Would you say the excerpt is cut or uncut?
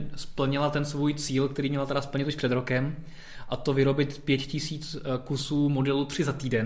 uncut